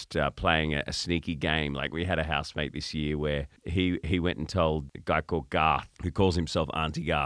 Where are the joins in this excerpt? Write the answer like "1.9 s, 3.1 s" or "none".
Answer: 3.6 s